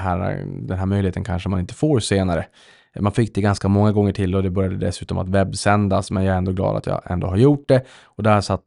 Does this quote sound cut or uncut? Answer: uncut